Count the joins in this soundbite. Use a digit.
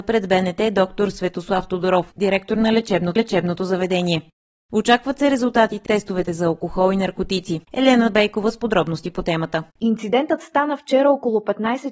5